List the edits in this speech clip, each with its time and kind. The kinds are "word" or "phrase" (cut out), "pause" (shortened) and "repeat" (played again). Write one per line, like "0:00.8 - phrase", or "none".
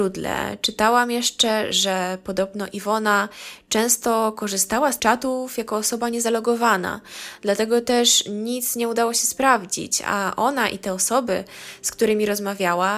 0:05.0 - word